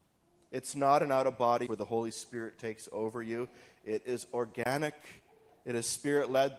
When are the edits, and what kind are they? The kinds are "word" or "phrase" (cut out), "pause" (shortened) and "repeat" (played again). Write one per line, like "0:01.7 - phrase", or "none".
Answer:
0:01.7 - word